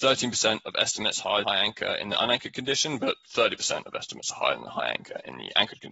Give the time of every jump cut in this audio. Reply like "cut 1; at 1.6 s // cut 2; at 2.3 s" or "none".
cut 1; at 1.4 s